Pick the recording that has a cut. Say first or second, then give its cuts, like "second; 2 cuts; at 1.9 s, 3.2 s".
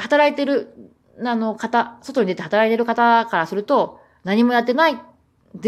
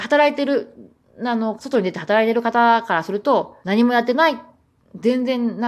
second; 2 cuts; at 1.6 s, 3.6 s